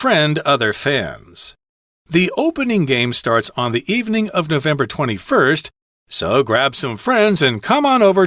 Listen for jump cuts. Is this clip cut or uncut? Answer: uncut